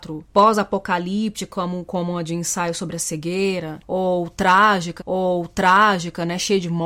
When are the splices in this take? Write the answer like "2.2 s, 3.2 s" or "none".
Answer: 5.0 s